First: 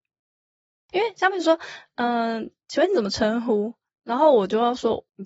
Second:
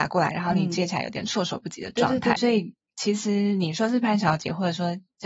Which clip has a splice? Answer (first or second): second